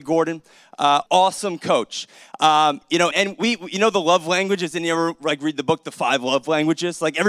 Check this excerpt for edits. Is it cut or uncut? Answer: cut